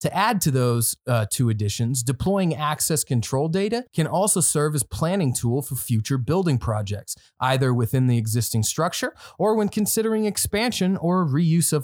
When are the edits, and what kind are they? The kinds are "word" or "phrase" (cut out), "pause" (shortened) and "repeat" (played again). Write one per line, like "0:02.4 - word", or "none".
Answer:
0:03.9 - pause